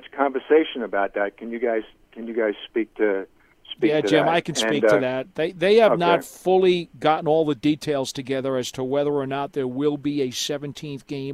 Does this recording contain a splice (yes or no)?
no